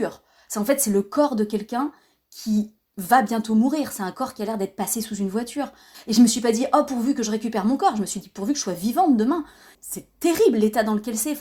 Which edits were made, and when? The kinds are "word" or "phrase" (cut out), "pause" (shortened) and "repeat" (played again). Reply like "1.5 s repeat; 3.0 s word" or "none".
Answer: none